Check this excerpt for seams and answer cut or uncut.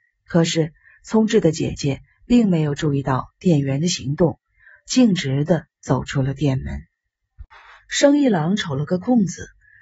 uncut